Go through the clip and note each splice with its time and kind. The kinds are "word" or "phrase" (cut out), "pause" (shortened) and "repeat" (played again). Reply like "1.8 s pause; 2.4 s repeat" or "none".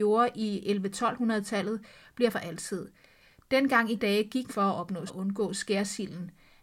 2.3 s word; 4.0 s word; 4.5 s word; 5.1 s word